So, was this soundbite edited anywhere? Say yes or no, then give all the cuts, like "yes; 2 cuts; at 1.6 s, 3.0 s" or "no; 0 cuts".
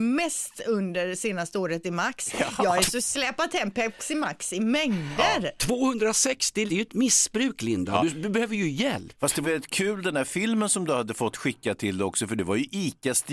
yes; 3 cuts; at 1.8 s, 6.7 s, 9.4 s